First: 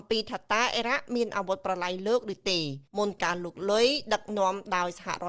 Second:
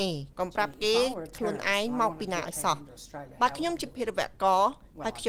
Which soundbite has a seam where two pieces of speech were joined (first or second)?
first